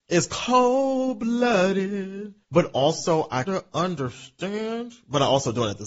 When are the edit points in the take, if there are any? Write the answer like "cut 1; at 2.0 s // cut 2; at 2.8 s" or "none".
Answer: cut 1; at 2.4 s // cut 2; at 3.4 s